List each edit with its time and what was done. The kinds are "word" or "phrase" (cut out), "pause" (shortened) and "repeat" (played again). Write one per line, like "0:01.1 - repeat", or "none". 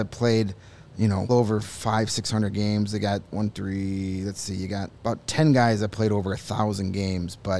0:01.3 - word
0:03.5 - word
0:05.0 - pause